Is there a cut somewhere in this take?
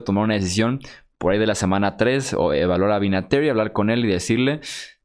no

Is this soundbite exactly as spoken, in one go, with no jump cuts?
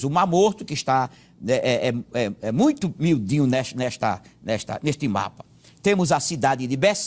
yes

